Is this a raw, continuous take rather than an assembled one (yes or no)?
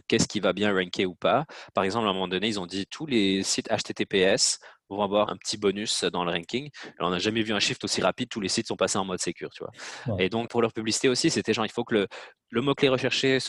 no